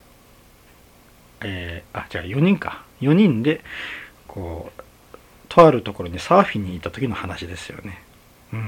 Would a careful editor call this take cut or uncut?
uncut